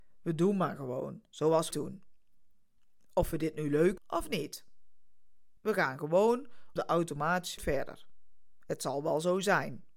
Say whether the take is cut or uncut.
cut